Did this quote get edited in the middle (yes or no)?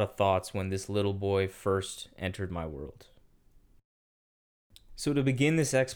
no